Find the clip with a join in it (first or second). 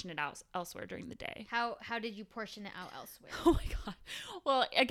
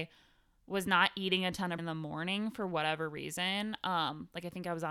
second